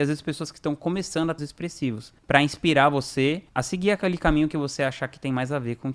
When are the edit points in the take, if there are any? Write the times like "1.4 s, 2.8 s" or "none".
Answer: 1.4 s